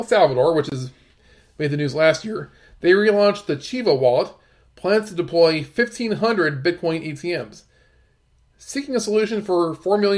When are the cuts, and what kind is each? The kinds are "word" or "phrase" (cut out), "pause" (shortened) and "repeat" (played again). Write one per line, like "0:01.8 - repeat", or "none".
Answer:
none